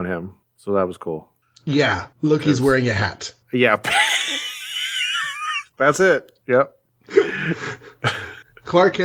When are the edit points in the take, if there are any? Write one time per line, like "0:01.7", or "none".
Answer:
0:02.1
0:03.4
0:05.7
0:06.4